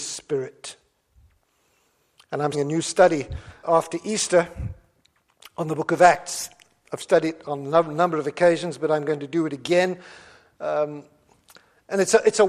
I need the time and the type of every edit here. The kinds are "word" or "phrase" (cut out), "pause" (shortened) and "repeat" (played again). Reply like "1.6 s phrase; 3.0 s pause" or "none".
2.5 s word; 3.6 s word